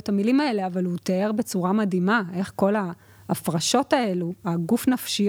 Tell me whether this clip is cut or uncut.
uncut